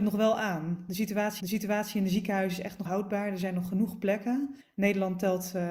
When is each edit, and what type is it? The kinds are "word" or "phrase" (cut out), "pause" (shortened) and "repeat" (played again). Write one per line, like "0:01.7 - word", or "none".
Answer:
0:01.4 - repeat
0:02.9 - word
0:04.6 - pause